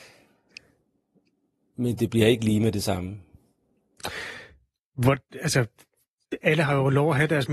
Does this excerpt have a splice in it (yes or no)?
no